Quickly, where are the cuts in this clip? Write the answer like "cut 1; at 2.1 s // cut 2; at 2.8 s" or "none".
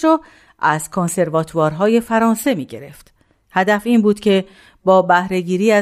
none